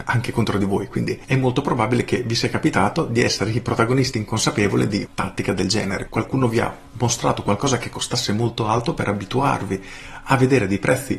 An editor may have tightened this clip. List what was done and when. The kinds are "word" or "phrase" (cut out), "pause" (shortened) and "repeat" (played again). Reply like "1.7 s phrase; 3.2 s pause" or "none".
5.0 s word; 6.1 s word